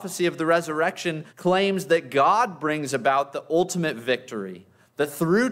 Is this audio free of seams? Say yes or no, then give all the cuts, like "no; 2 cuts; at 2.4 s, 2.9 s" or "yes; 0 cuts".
no; 1 cut; at 1.3 s